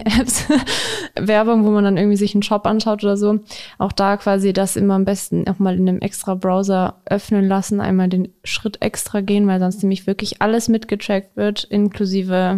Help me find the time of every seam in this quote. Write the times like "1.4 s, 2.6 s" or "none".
none